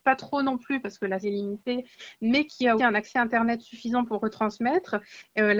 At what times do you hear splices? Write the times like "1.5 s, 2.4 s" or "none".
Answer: 1.2 s, 2.8 s